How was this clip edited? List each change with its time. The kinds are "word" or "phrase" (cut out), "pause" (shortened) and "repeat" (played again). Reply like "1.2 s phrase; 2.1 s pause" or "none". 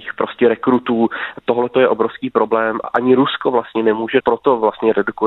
2.8 s word; 4.2 s word